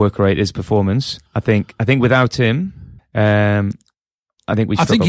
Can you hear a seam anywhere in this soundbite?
yes; 2 cuts; at 1.3 s, 3.0 s

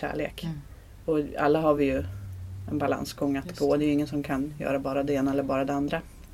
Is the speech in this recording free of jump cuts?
yes; 0 cuts

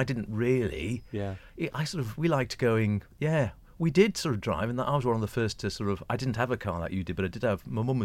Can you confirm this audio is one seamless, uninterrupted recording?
yes; 0 cuts

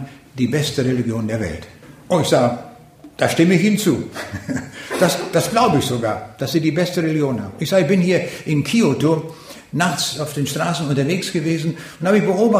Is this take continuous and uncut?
yes; 0 cuts

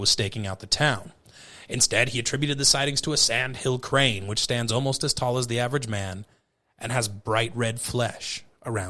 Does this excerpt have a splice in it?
no; 0 cuts

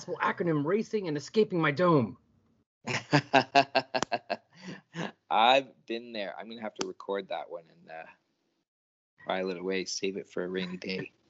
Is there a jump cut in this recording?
no; 0 cuts

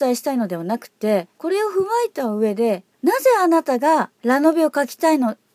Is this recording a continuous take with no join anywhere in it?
no; 3 cuts; at 1.3 s, 2.9 s, 4.1 s

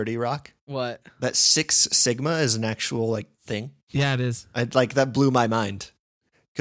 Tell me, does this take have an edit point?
yes; 1 cut; at 3.3 s

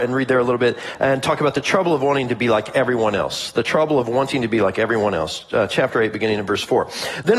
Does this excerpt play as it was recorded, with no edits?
yes; 0 cuts

